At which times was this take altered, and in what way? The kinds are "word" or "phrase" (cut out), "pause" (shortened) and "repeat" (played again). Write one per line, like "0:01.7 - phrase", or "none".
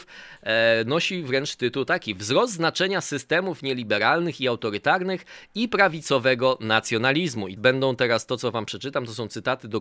0:07.6 - word